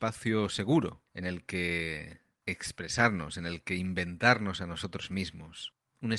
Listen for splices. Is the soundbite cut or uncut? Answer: cut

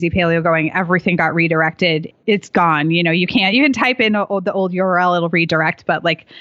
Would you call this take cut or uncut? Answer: uncut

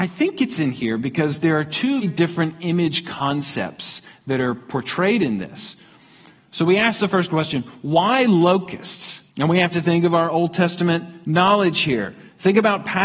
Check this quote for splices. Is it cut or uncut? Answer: cut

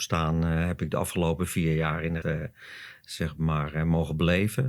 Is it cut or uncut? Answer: cut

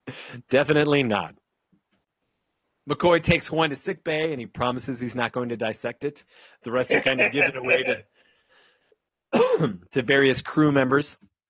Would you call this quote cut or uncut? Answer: uncut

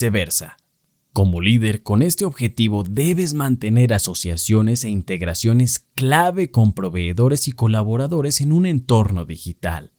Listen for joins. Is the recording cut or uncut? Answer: uncut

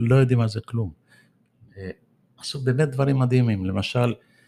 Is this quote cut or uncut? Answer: uncut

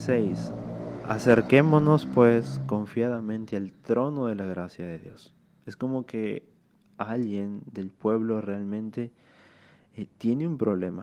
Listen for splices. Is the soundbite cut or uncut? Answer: uncut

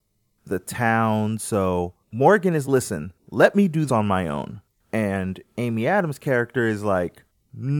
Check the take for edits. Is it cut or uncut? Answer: cut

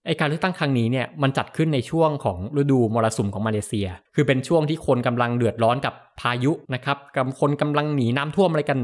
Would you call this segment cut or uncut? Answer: cut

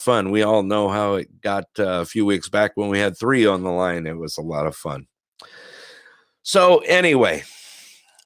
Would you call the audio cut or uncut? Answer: uncut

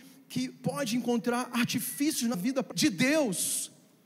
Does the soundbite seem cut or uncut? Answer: cut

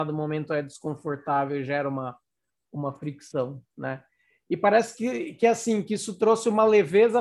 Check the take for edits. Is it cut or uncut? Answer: uncut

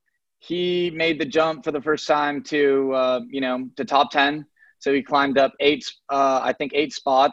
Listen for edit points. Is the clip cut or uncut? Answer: uncut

